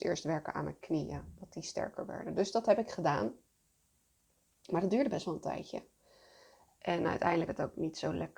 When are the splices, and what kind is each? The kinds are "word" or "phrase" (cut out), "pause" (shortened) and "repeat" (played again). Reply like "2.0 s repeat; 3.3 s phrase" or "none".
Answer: 7.5 s word